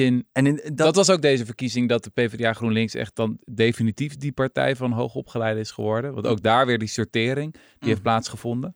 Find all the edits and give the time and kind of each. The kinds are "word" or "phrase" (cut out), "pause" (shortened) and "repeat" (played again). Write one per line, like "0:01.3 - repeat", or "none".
none